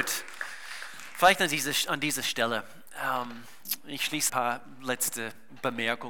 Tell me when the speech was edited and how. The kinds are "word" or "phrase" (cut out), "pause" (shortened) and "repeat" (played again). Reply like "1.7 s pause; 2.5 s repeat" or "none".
4.3 s phrase